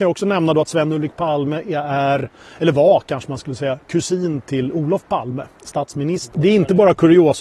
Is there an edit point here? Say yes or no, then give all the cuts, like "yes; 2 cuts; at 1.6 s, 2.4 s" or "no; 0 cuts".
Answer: no; 0 cuts